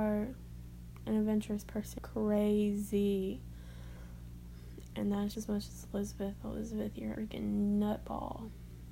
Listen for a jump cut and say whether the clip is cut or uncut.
cut